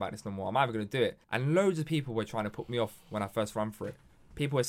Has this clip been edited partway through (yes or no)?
yes